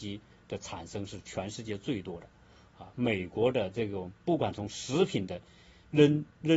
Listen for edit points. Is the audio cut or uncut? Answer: uncut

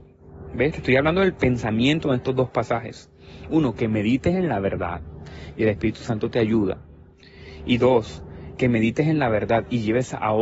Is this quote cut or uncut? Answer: uncut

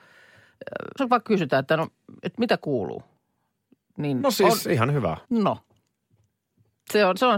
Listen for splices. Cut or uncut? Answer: cut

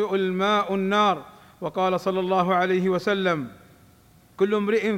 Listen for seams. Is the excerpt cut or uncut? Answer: uncut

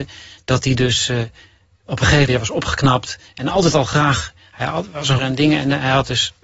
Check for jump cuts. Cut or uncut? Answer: cut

